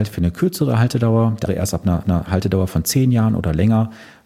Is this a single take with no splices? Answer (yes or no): no